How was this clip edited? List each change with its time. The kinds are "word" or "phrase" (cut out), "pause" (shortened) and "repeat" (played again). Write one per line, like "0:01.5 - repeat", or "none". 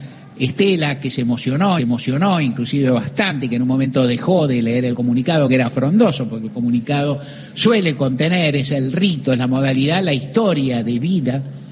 0:01.8 - repeat